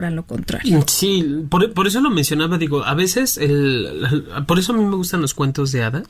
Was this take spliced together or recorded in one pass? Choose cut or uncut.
uncut